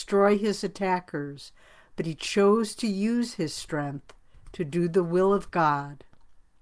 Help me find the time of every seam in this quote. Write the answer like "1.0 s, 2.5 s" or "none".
none

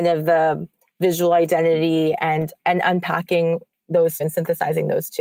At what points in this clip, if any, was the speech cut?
2.6 s, 4.2 s

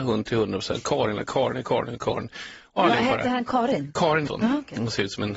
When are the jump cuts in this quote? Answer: 4.3 s

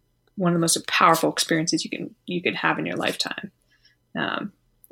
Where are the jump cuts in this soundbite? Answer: none

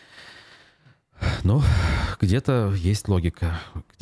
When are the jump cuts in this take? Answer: none

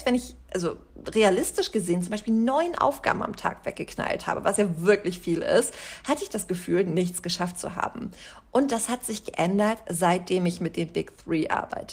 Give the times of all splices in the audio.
none

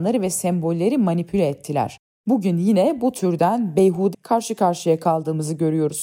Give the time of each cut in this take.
4.1 s

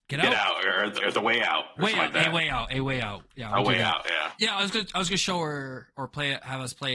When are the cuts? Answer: 1.0 s

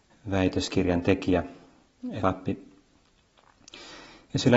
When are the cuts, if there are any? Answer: 2.2 s

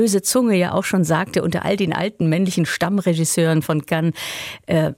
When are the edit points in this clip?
none

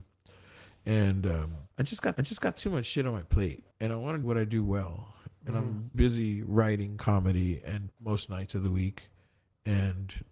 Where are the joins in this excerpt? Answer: 1.7 s, 2.1 s, 3.7 s, 4.2 s, 5.9 s, 7.9 s

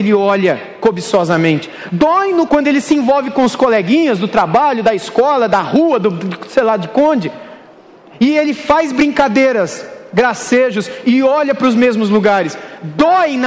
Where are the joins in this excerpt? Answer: 2.5 s

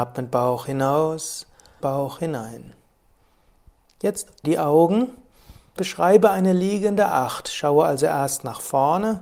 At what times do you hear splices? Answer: 1.8 s, 4.4 s, 5.8 s

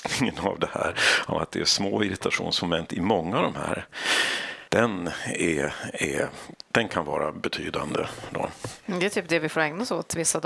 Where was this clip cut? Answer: 4.7 s

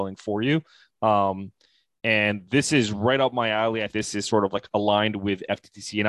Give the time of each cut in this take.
3.9 s

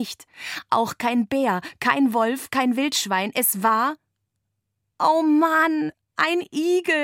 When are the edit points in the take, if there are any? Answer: none

